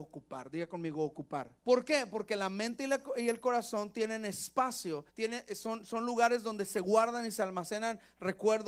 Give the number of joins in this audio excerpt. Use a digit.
2